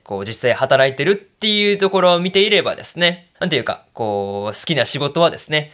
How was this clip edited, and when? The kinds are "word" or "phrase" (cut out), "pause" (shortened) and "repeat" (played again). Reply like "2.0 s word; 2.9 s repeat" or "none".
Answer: 3.3 s pause